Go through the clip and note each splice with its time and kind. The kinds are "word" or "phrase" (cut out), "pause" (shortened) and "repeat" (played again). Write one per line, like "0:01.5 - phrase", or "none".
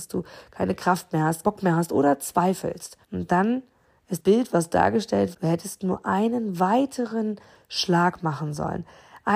0:01.4 - word
0:03.0 - pause
0:04.2 - word
0:05.3 - word